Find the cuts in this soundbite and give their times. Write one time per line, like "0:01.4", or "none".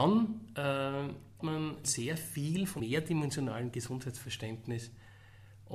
0:01.4
0:01.8
0:02.8